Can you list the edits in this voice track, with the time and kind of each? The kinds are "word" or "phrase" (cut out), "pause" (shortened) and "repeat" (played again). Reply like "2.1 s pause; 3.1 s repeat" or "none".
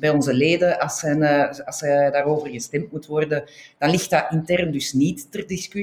none

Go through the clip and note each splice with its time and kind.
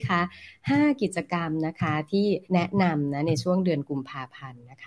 2.4 s pause

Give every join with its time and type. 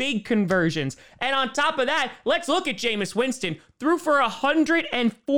none

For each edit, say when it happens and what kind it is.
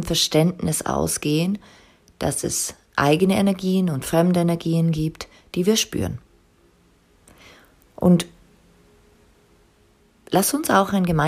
none

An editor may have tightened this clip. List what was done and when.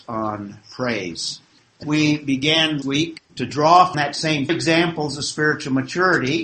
1.8 s word; 2.8 s word; 3.3 s pause; 3.9 s word; 4.5 s phrase

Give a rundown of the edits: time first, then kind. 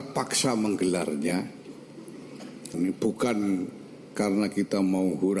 2.7 s word

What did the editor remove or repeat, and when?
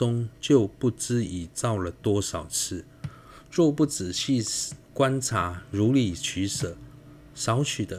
4.8 s pause

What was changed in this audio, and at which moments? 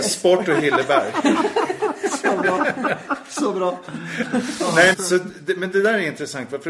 4.9 s word

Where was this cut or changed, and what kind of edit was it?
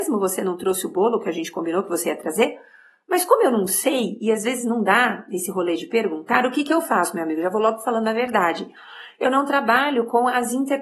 none

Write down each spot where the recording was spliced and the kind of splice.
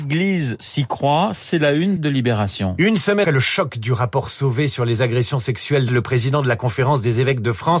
2.0 s word; 3.2 s word; 5.9 s word

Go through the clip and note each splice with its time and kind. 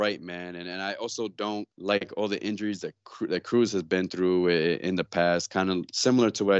1.7 s pause

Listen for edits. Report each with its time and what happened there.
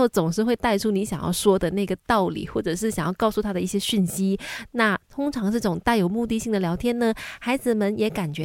none

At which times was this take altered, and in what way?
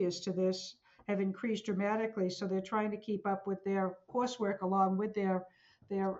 none

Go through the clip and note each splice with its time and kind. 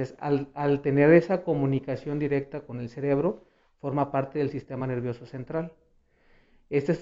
none

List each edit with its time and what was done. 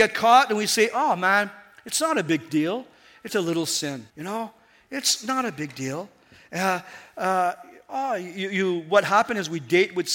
3.3 s word; 4.1 s pause

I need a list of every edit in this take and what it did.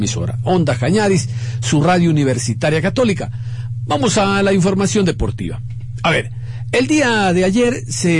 none

